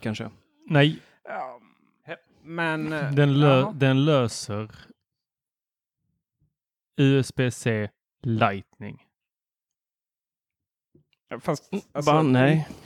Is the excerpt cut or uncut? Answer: uncut